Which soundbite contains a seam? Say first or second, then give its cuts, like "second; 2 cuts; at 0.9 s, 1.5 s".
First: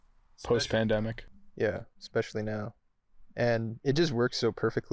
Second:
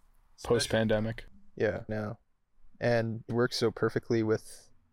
second; 2 cuts; at 1.9 s, 3.3 s